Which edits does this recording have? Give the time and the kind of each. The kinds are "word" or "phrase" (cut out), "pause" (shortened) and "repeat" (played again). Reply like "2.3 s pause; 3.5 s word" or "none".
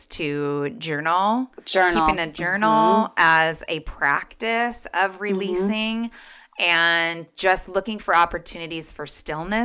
none